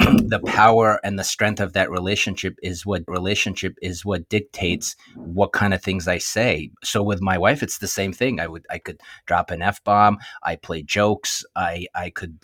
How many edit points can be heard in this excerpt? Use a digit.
1